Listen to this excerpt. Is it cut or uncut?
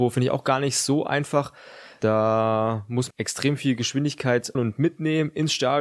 cut